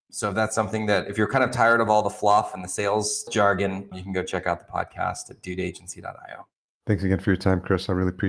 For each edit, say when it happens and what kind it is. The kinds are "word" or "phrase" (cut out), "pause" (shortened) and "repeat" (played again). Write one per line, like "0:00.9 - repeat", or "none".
none